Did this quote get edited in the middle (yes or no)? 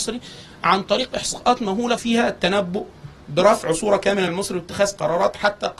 yes